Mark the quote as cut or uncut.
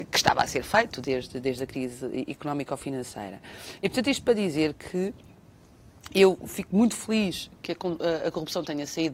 uncut